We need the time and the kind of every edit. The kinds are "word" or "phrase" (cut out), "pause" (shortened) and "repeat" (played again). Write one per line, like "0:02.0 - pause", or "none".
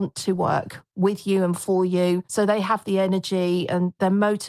0:02.2 - pause

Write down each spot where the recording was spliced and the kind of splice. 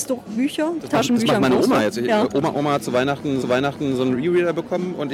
0:03.4 - repeat

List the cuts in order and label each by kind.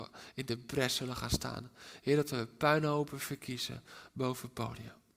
none

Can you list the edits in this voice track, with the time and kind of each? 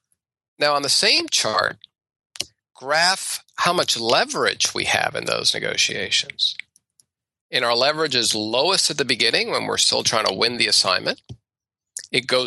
none

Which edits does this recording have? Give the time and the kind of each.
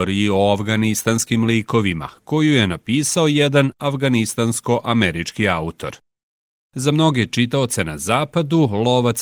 none

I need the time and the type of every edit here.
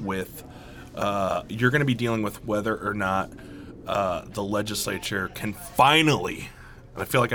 none

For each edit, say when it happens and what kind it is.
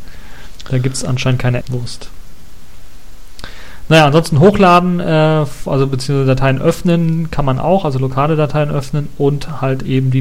0:01.6 - word

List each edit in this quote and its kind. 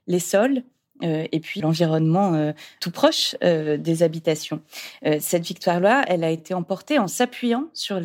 0:01.6 - word

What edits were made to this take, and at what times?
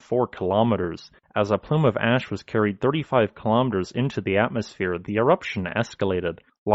none

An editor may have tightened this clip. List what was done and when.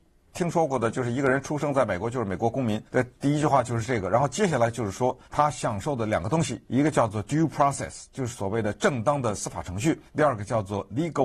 0:02.9 - pause
0:03.2 - pause
0:05.2 - pause
0:06.7 - pause
0:10.1 - pause

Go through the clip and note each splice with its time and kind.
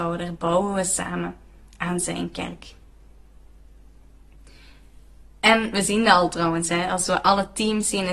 none

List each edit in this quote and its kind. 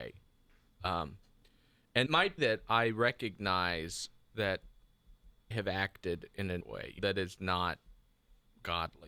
0:02.1 - word
0:02.4 - word
0:05.5 - word
0:06.6 - word
0:07.0 - word

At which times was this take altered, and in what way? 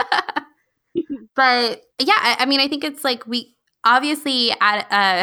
0:01.9 - pause

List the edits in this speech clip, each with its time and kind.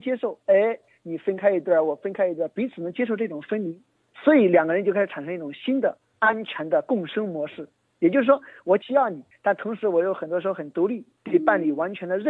none

